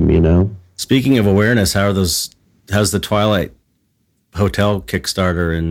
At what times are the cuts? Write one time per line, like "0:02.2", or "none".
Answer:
none